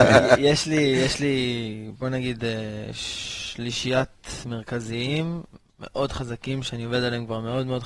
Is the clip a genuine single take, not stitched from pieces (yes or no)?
no